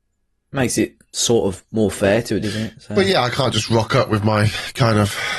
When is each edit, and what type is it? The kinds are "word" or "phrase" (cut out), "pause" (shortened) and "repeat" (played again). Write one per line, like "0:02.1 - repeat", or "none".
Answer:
0:02.4 - word